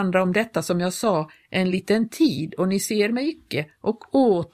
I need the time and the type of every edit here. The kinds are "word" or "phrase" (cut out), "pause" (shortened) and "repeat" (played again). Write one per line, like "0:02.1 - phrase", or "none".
none